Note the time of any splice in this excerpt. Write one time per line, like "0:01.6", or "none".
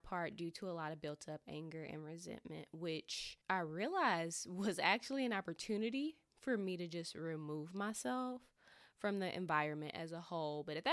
0:03.4